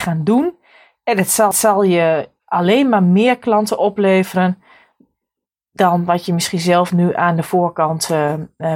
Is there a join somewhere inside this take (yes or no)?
yes